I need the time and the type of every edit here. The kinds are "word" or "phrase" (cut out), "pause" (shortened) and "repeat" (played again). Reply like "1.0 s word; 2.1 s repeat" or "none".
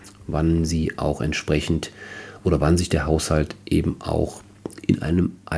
none